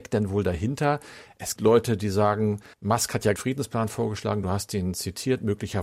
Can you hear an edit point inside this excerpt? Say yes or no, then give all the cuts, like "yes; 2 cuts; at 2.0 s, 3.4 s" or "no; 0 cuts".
yes; 3 cuts; at 1.6 s, 2.7 s, 3.4 s